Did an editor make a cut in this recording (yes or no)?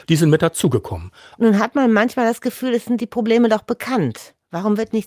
no